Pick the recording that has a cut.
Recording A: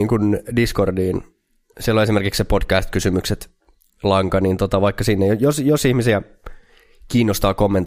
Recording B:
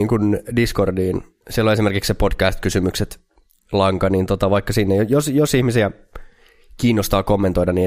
B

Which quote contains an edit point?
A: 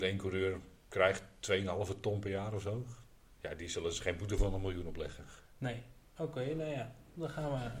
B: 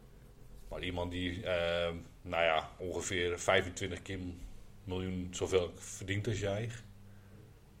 A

